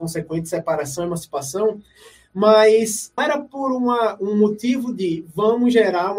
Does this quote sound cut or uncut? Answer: cut